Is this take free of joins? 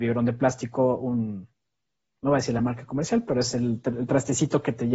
yes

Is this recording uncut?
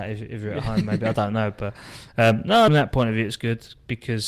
no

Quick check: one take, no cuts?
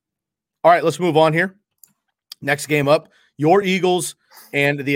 yes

